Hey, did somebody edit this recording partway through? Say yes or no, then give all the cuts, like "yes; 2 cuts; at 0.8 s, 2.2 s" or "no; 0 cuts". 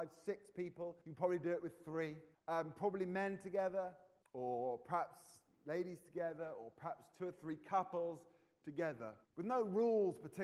yes; 4 cuts; at 1.0 s, 2.3 s, 4.2 s, 9.2 s